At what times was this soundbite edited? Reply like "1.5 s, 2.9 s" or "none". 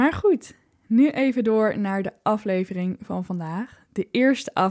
none